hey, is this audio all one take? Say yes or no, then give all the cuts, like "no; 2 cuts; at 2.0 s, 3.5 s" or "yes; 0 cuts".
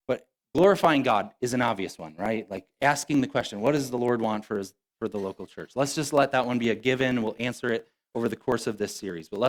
yes; 0 cuts